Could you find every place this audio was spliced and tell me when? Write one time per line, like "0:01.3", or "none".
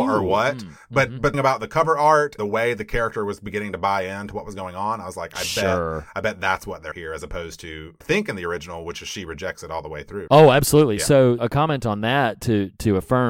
0:01.3
0:02.4
0:06.9
0:08.0
0:10.3
0:11.4